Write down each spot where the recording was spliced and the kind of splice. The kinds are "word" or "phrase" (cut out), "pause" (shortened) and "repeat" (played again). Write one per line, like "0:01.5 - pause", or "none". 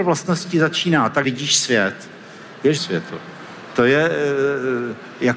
0:01.2 - word
0:02.8 - phrase